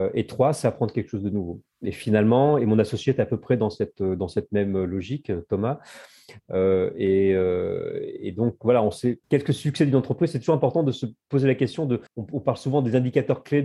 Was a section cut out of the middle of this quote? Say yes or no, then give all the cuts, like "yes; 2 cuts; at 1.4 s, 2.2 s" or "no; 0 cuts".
yes; 3 cuts; at 1.7 s, 9.2 s, 12.1 s